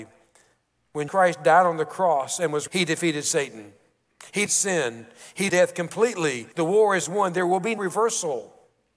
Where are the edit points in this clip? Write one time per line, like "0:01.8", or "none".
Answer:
0:01.1
0:02.7
0:04.5
0:05.5
0:06.5
0:07.8